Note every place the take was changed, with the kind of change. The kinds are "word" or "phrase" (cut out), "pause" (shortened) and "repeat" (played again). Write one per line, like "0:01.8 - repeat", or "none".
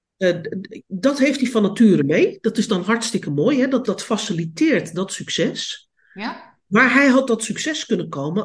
0:03.8 - word
0:06.6 - pause
0:07.3 - phrase